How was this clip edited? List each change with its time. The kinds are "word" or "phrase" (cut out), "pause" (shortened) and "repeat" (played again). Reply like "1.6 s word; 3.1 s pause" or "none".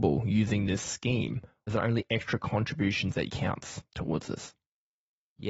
1.7 s word; 3.3 s phrase